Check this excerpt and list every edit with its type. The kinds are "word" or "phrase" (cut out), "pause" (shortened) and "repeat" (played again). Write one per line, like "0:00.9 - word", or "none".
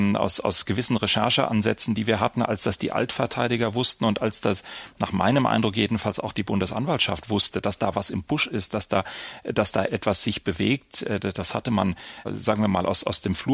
0:09.9 - word
0:12.2 - word

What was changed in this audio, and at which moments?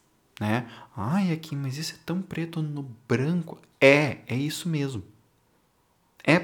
none

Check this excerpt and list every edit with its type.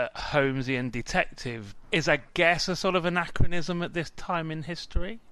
0:01.8 - word

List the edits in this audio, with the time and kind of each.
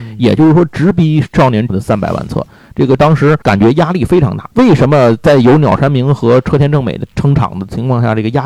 0:01.7 - word
0:03.0 - word
0:03.4 - pause
0:04.5 - pause

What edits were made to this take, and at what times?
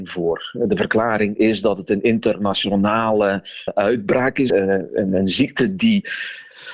0:03.7 - word
0:04.5 - word

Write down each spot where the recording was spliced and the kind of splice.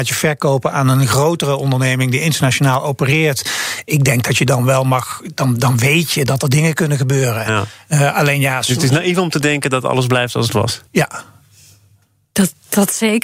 0:10.9 - pause

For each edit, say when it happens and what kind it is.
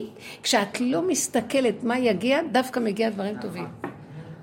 none

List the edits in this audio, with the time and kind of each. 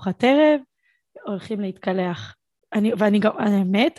none

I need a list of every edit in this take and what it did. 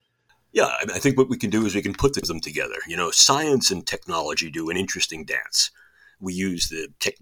0:02.2 - word

